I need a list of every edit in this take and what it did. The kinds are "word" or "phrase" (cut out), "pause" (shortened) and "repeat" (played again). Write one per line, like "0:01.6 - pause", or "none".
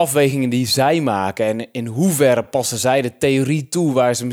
none